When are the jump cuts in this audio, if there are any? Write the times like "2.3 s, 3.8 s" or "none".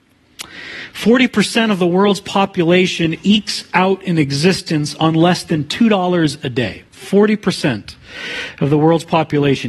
6.9 s